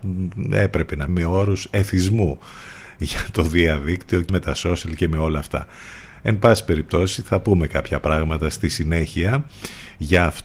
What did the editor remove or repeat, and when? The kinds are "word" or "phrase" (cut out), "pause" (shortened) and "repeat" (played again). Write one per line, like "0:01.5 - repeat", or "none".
0:01.1 - word
0:04.3 - word